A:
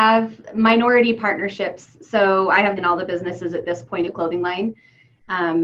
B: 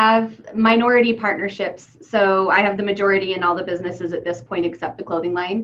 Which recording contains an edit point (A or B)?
A